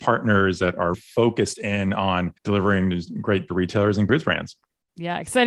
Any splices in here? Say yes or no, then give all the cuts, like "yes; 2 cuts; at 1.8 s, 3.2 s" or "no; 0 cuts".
yes; 4 cuts; at 0.9 s, 2.4 s, 3.5 s, 4.1 s